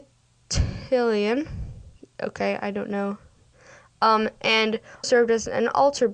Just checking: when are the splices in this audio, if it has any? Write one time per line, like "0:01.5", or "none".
0:02.0
0:05.0